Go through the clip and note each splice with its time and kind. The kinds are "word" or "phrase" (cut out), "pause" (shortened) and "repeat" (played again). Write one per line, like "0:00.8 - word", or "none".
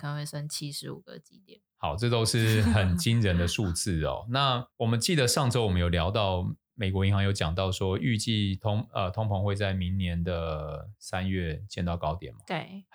0:01.7 - pause
0:04.7 - pause